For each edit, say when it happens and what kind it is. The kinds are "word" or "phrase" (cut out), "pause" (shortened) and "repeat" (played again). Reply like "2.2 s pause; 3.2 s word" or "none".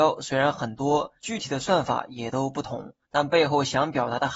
1.2 s pause; 3.0 s pause